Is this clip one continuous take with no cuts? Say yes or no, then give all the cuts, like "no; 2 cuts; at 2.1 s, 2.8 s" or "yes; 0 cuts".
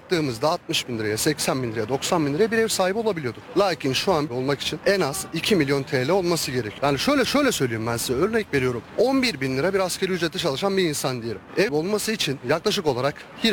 no; 3 cuts; at 4.3 s, 7.2 s, 11.7 s